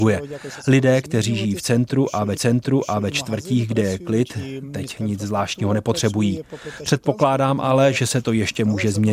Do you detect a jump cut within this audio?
yes; 1 cut; at 2.4 s

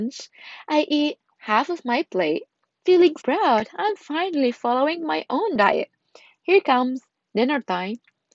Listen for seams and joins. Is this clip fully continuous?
no; 1 cut; at 3.2 s

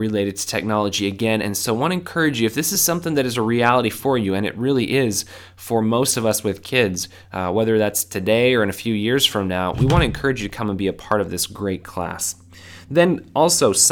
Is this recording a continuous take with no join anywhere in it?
yes; 0 cuts

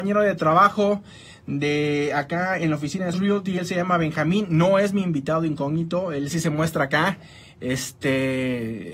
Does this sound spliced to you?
yes; 2 cuts; at 3.1 s, 6.3 s

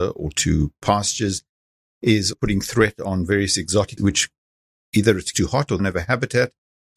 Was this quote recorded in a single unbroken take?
no; 4 cuts; at 2.3 s, 4.0 s, 5.3 s, 5.8 s

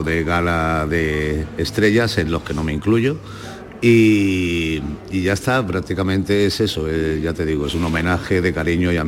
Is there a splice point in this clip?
no; 0 cuts

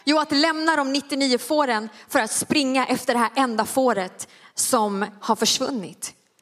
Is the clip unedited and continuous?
yes; 0 cuts

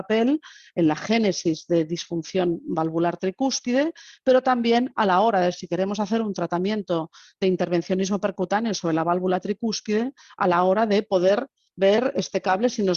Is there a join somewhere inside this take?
no; 0 cuts

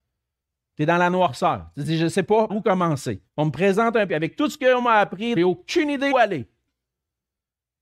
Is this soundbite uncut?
no; 5 cuts; at 2.5 s, 3.3 s, 4.1 s, 5.4 s, 6.1 s

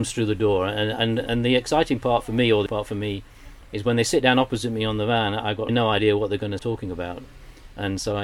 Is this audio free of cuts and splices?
no; 4 cuts; at 1.2 s, 2.7 s, 5.7 s, 6.6 s

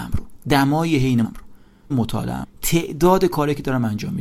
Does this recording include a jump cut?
yes; 3 cuts; at 1.2 s, 1.9 s, 2.4 s

